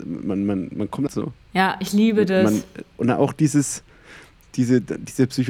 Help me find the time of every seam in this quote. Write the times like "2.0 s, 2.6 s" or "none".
1.1 s, 1.4 s